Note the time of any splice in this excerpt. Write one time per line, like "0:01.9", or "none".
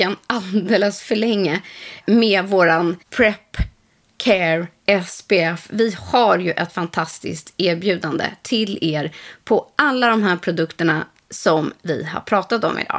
0:03.0